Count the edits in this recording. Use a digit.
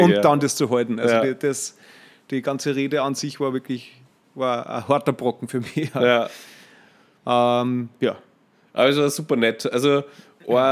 0